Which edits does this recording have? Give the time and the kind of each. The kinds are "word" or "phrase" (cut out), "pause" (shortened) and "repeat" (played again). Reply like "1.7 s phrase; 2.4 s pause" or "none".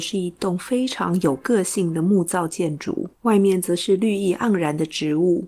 3.1 s pause